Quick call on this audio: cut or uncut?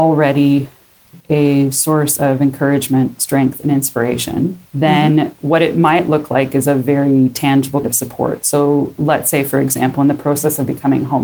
cut